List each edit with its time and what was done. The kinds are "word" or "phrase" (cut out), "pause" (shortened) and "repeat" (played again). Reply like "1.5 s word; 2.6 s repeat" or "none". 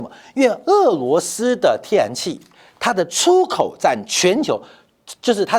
none